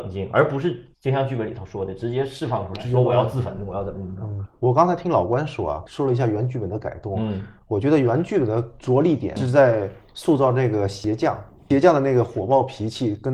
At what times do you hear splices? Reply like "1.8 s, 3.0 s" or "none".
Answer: 0.9 s